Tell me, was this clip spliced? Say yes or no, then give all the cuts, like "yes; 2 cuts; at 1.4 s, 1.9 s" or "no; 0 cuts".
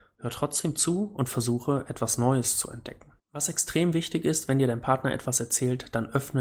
yes; 1 cut; at 3.2 s